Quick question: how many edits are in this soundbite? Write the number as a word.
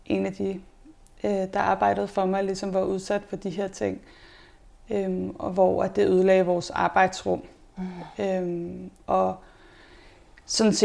zero